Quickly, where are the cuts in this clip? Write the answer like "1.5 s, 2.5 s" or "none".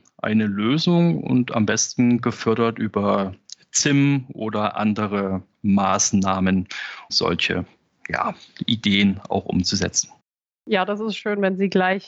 7.1 s